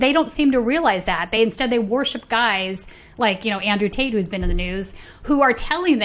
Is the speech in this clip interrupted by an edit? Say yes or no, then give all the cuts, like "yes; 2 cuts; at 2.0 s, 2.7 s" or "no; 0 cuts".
no; 0 cuts